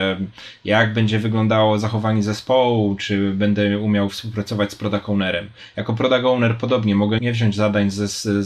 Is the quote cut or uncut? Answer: cut